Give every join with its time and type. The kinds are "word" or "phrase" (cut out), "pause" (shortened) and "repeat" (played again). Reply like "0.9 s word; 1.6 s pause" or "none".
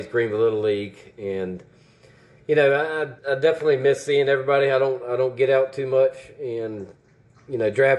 3.2 s pause